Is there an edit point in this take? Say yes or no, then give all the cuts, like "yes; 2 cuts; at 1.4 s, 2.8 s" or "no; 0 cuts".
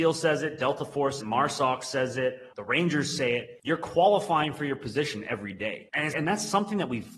yes; 3 cuts; at 1.2 s, 2.5 s, 6.1 s